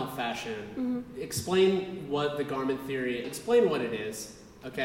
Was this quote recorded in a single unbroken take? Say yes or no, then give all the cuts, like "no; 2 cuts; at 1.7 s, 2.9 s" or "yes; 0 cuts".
no; 1 cut; at 3.2 s